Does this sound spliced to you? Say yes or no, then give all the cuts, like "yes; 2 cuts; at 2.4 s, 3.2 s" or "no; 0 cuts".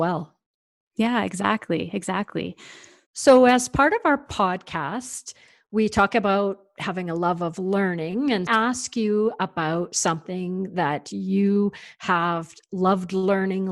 yes; 1 cut; at 8.5 s